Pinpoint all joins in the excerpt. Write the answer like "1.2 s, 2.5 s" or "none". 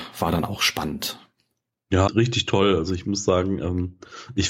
2.1 s